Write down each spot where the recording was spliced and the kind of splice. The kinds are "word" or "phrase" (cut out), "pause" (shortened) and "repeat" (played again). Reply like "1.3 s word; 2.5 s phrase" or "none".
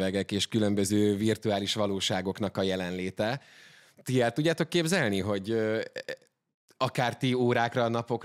none